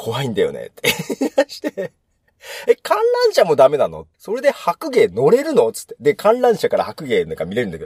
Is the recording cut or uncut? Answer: cut